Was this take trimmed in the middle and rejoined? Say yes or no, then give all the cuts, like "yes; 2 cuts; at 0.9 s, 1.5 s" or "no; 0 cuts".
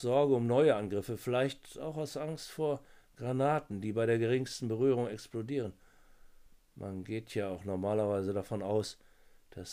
no; 0 cuts